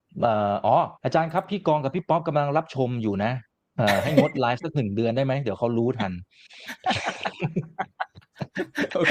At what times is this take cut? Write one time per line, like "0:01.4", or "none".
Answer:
0:01.0